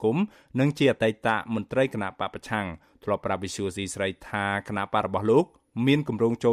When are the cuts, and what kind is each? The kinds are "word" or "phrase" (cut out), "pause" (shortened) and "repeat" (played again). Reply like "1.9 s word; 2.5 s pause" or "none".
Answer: none

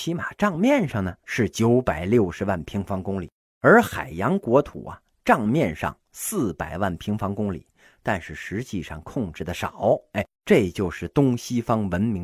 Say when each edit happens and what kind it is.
1.2 s word; 3.4 s pause; 10.4 s pause

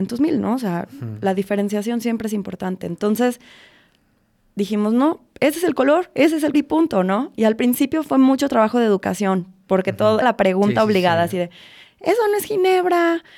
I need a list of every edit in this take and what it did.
6.5 s word; 10.2 s word

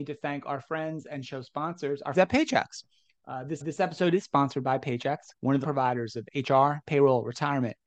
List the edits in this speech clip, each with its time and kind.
2.1 s word; 3.6 s repeat; 5.3 s pause; 5.6 s word

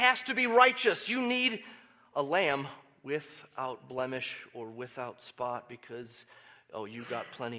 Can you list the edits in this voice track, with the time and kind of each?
none

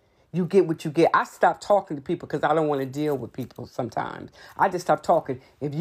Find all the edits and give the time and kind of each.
none

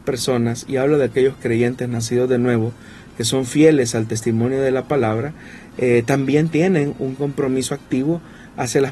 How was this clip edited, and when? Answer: none

